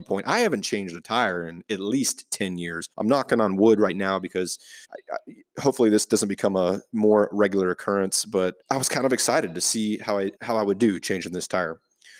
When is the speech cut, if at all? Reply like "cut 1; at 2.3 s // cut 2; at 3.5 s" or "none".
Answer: cut 1; at 2.9 s // cut 2; at 4.8 s // cut 3; at 8.6 s // cut 4; at 10.4 s

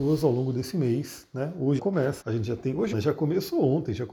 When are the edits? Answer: cut 1; at 1.8 s // cut 2; at 2.2 s // cut 3; at 2.9 s

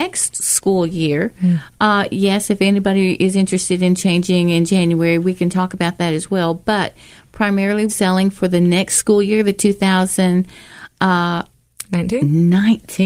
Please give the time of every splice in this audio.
cut 1; at 7.9 s

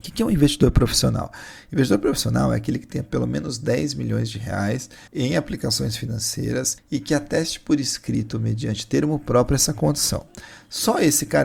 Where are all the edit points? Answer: cut 1; at 5.1 s // cut 2; at 6.8 s

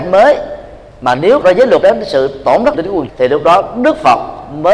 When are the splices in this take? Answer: cut 1; at 1.4 s // cut 2; at 1.8 s // cut 3; at 2.7 s // cut 4; at 3.1 s

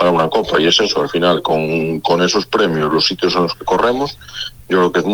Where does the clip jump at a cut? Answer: none

